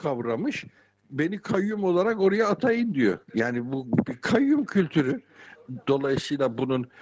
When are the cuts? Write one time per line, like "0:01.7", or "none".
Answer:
0:03.2